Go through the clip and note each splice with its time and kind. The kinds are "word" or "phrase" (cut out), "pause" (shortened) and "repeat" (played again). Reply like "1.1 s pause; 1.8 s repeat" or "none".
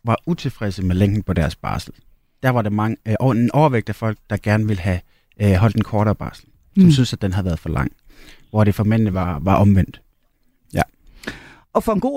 none